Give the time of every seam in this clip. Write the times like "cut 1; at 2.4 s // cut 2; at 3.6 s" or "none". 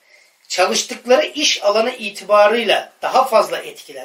none